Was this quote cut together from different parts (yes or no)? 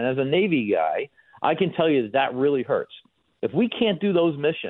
no